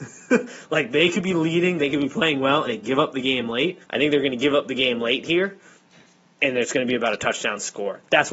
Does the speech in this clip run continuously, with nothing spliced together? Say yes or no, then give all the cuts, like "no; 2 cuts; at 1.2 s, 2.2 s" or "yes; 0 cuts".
no; 2 cuts; at 2.7 s, 3.8 s